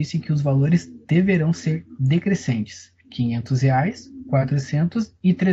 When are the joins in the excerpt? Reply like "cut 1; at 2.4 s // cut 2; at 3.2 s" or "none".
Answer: cut 1; at 1.0 s // cut 2; at 3.0 s